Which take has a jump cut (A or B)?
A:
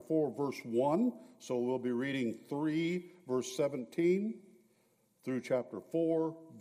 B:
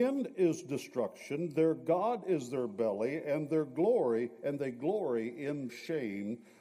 B